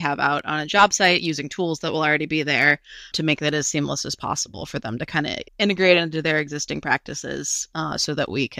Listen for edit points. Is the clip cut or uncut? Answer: cut